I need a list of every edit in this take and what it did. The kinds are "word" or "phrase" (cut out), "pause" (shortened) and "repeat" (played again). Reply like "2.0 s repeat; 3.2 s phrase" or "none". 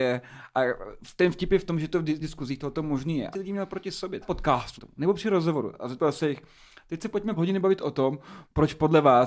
2.2 s word; 3.3 s word; 4.2 s word; 4.8 s word; 7.4 s word

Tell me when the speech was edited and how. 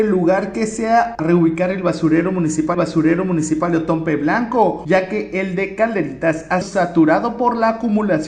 1.2 s phrase; 2.7 s repeat; 6.6 s word

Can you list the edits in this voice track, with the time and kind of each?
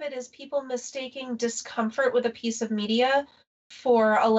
none

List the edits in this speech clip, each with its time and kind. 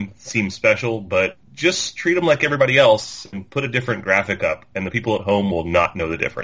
1.4 s pause

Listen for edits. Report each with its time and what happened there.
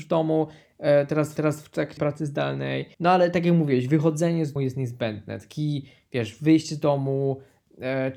1.4 s repeat; 2.0 s word; 2.9 s pause; 4.6 s word

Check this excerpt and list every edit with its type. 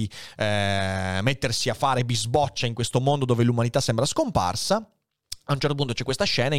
none

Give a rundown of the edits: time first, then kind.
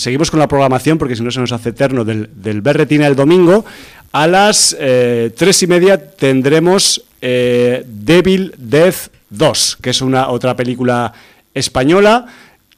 none

